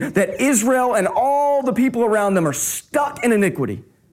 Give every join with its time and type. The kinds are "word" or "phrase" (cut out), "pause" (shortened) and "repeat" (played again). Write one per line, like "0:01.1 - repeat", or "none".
none